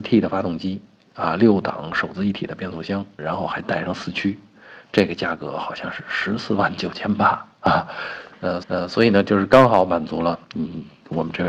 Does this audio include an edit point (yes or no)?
yes